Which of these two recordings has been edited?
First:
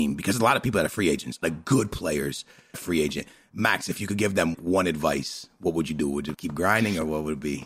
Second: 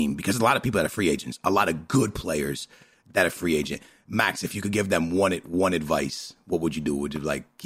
first; 4 cuts; at 1.4 s, 2.7 s, 4.5 s, 6.3 s

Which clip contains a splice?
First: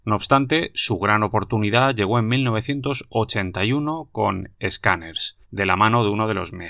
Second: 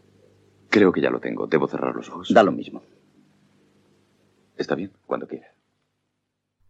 first; 1 cut; at 5.4 s

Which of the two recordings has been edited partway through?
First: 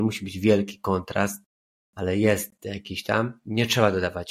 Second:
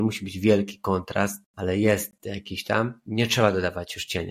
second; 1 cut; at 1.5 s

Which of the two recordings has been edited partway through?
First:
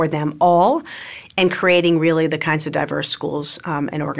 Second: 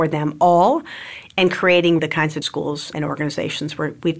second; 3 cuts; at 2.0 s, 2.4 s, 2.9 s

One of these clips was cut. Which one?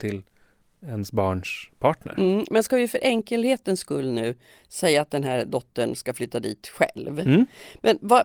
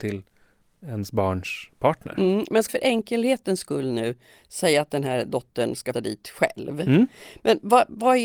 second; 2 cuts; at 2.7 s, 5.9 s

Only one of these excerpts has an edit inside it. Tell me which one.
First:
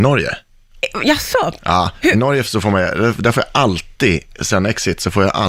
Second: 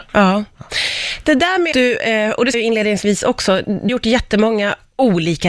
second; 3 cuts; at 1.7 s, 2.5 s, 3.9 s

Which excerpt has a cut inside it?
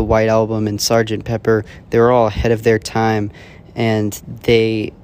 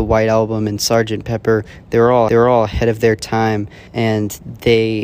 second; 2 cuts; at 2.3 s, 3.9 s

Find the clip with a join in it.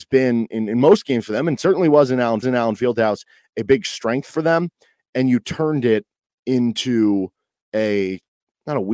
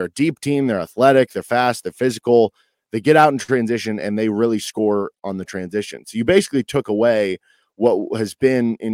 first; 1 cut; at 2.4 s

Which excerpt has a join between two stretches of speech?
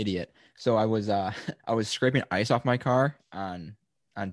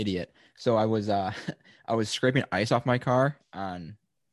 first; 1 cut; at 1.6 s

